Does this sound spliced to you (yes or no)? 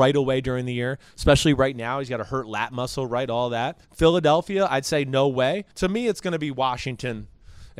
yes